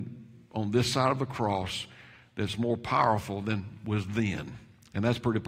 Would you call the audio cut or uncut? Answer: uncut